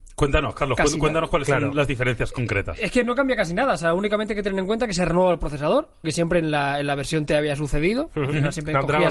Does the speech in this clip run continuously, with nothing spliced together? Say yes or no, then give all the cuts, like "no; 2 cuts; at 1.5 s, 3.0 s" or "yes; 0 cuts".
no; 1 cut; at 6.0 s